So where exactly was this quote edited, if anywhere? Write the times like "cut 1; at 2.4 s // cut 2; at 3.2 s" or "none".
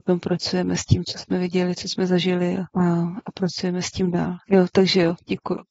cut 1; at 2.7 s